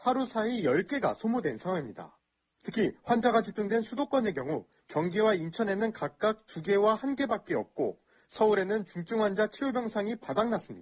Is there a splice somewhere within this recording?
no; 0 cuts

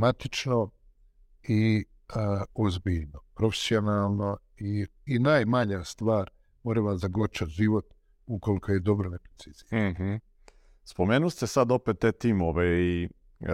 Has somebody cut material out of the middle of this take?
yes; 1 cut; at 5.1 s

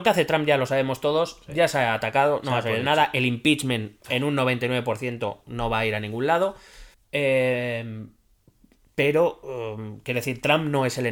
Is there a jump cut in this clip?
yes; 2 cuts; at 4.0 s, 6.9 s

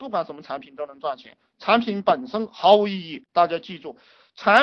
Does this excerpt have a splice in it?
yes; 1 cut; at 3.3 s

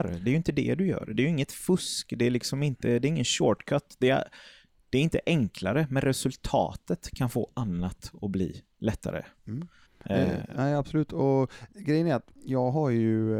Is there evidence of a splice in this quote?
yes; 3 cuts; at 9.9 s, 11.7 s, 12.3 s

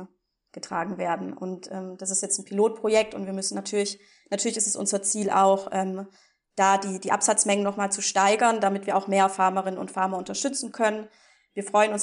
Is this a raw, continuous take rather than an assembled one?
yes; 0 cuts

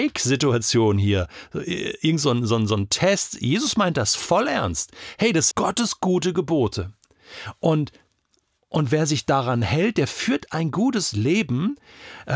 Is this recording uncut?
no; 1 cut; at 5.5 s

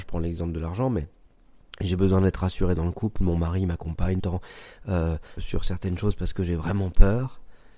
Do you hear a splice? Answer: yes; 2 cuts; at 4.2 s, 5.4 s

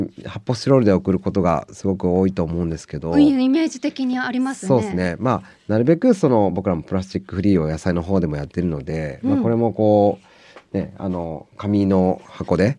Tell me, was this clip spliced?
no; 0 cuts

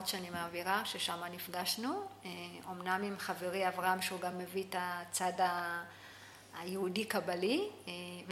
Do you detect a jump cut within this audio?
no; 0 cuts

